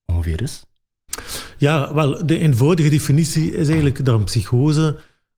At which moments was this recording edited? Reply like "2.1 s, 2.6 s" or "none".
none